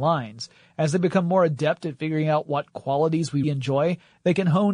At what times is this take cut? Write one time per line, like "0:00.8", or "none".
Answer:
0:03.4